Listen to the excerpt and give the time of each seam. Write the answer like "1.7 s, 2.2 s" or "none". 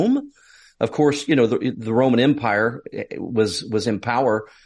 none